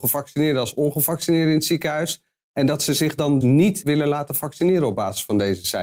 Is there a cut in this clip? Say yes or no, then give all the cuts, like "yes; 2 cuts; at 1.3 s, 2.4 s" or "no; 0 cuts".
yes; 1 cut; at 3.4 s